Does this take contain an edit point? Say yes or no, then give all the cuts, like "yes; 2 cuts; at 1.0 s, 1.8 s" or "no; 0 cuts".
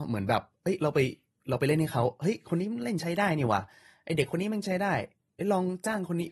no; 0 cuts